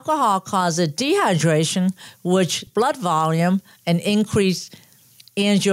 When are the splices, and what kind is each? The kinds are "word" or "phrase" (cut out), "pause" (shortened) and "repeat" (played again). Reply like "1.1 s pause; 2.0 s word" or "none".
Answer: 2.7 s phrase